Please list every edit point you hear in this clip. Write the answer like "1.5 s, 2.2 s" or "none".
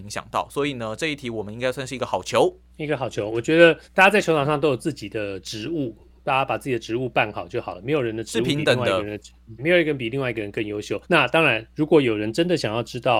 2.7 s, 3.8 s, 9.6 s, 11.0 s